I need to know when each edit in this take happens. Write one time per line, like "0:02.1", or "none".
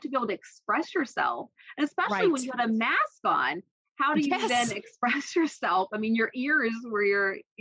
none